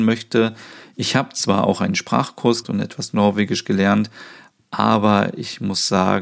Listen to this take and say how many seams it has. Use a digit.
1